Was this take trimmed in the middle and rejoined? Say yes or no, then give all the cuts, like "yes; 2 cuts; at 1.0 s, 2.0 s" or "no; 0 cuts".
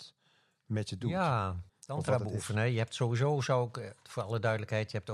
yes; 1 cut; at 1.7 s